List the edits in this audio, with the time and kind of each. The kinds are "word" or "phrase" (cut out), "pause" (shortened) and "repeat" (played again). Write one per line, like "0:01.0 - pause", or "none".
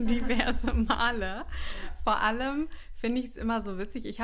none